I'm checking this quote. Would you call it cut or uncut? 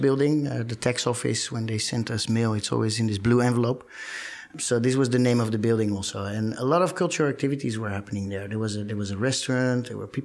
uncut